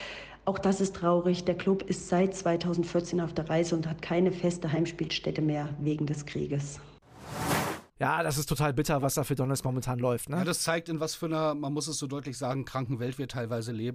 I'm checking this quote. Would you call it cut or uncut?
uncut